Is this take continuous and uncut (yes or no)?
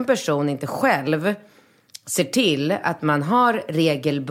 yes